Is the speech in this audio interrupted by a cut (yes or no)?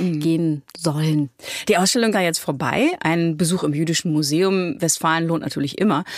yes